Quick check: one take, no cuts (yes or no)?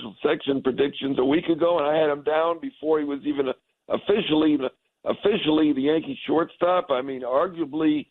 no